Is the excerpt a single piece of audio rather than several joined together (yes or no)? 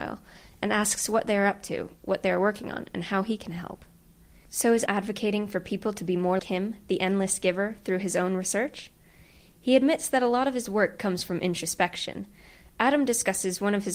no